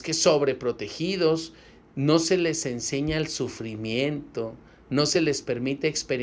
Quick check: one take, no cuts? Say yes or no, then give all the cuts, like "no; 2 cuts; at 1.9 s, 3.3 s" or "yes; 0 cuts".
yes; 0 cuts